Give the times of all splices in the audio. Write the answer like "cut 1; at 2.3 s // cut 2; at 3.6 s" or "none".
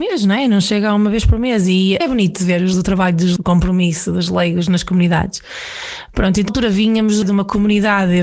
cut 1; at 2.0 s // cut 2; at 2.7 s // cut 3; at 3.4 s // cut 4; at 6.5 s // cut 5; at 7.2 s